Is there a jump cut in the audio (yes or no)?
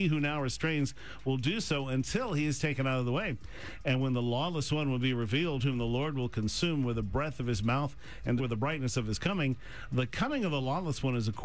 yes